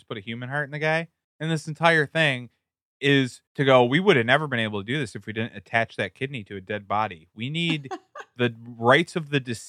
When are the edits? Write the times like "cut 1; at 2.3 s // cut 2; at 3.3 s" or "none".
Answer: cut 1; at 1.2 s // cut 2; at 3.5 s

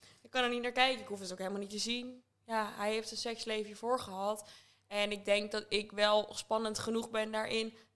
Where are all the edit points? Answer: none

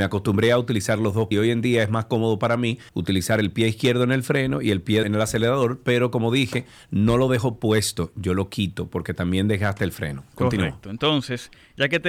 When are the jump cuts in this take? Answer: cut 1; at 1.3 s // cut 2; at 2.9 s // cut 3; at 5.0 s

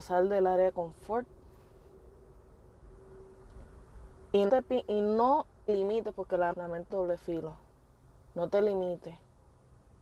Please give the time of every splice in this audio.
cut 1; at 4.5 s // cut 2; at 5.7 s // cut 3; at 6.5 s // cut 4; at 6.9 s

